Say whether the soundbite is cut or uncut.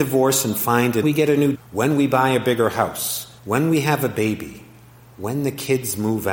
cut